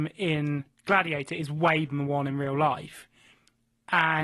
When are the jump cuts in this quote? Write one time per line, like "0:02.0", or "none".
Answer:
0:01.9